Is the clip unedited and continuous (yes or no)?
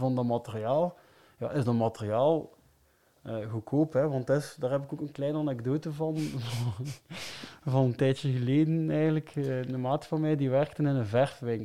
yes